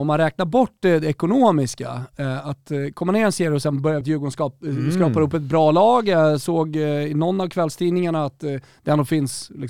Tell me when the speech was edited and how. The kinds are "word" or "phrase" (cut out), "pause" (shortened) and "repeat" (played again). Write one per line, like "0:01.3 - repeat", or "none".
0:04.0 - phrase

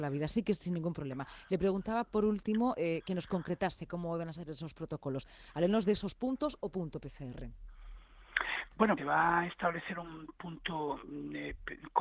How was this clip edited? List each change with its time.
0:09.0 - word

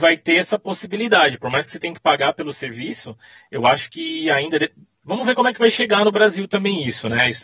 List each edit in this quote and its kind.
none

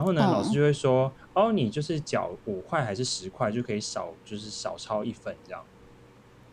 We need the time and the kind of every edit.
none

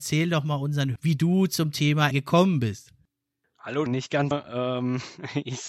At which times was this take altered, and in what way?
0:01.0 - word
0:02.1 - word
0:03.9 - word
0:04.3 - word

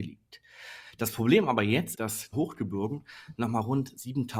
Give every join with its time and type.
0:01.9 - word
0:02.3 - phrase

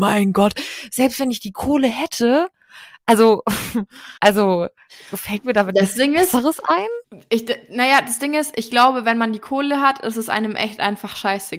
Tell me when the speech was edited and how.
0:04.2 - pause

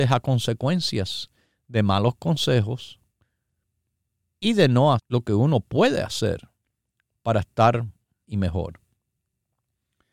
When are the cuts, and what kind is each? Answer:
0:05.0 - word
0:08.2 - word

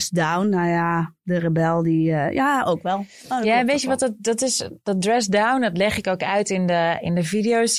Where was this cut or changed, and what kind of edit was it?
none

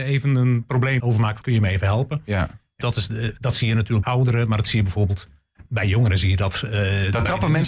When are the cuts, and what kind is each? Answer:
0:01.0 - word
0:01.4 - word
0:02.8 - word
0:04.0 - word
0:05.7 - word

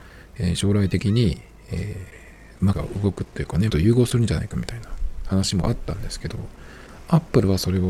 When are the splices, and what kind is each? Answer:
0:02.7 - word
0:03.7 - word

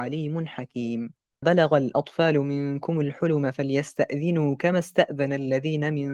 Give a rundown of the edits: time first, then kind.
0:01.4 - word

